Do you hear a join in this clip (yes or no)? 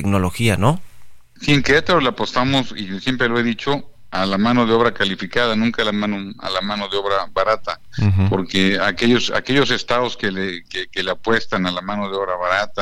no